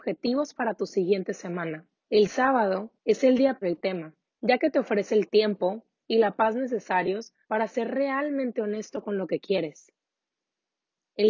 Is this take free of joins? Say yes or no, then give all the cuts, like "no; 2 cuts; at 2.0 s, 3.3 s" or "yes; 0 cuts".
no; 5 cuts; at 2.0 s, 3.0 s, 3.6 s, 4.2 s, 7.4 s